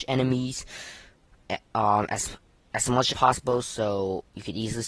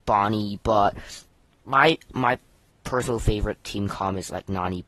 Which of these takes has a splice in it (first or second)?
first